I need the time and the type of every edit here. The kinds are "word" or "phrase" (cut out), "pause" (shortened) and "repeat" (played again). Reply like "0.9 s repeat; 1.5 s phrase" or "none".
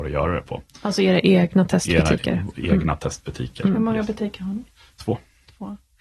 none